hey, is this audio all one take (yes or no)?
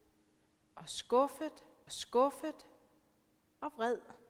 no